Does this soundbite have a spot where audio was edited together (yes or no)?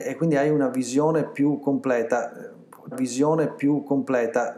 yes